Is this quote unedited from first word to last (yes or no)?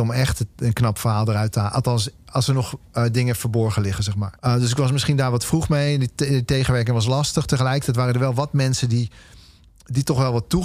no